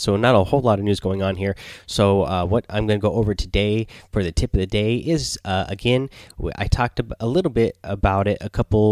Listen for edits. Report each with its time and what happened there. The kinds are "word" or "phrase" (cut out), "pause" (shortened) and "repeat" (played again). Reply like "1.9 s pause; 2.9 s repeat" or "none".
none